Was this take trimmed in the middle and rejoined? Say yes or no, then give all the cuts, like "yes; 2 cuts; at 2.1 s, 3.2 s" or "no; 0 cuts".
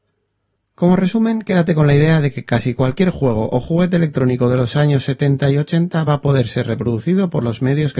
no; 0 cuts